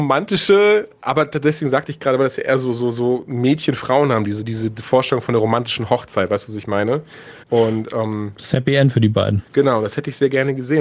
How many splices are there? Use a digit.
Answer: 2